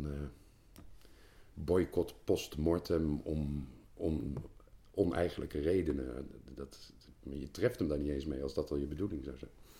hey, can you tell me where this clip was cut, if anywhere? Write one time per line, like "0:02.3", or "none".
0:04.8